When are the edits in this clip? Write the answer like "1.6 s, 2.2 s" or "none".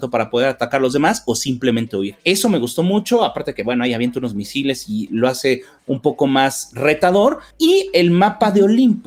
none